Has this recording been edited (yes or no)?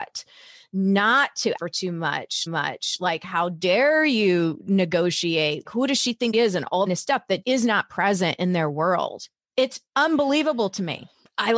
yes